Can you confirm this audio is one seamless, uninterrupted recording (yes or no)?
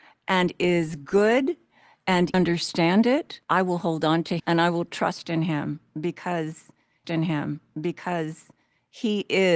no